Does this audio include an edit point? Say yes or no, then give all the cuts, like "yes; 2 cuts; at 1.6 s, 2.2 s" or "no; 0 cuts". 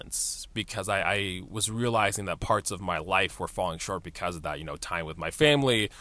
no; 0 cuts